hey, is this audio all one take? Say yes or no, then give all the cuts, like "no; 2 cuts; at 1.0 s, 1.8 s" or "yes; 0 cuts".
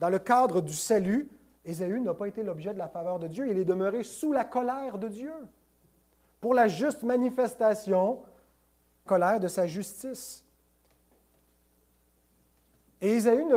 no; 1 cut; at 9.1 s